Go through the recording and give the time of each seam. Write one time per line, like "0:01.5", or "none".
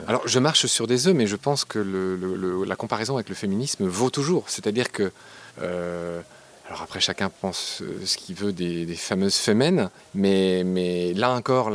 0:05.5
0:10.0

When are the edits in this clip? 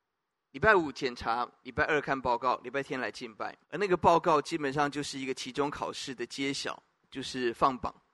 0:03.6
0:07.0

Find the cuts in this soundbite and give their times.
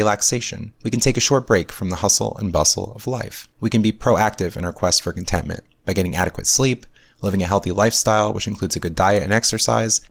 none

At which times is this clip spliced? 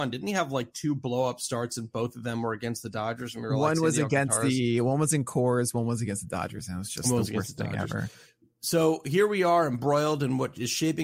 none

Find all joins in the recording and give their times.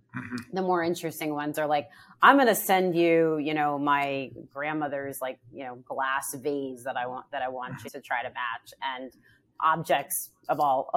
0:04.5
0:07.9

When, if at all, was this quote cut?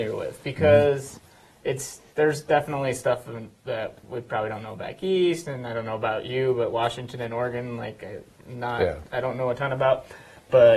0:02.1

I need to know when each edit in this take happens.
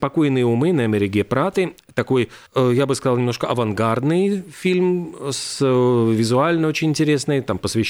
0:02.5

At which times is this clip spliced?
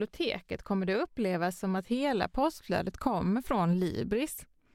none

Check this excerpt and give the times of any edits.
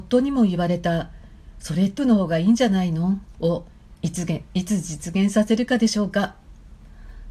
0:02.0

